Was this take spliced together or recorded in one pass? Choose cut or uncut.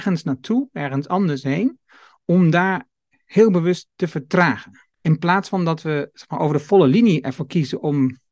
cut